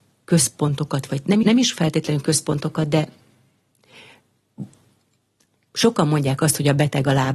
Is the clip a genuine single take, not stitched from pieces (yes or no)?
no